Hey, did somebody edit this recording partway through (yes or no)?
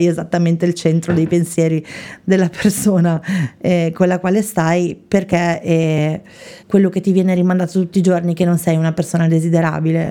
yes